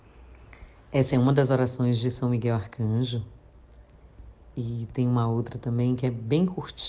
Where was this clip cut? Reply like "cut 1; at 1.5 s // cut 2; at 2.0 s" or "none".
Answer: none